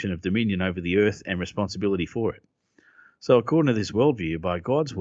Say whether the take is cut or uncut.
uncut